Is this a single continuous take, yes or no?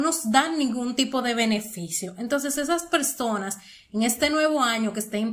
yes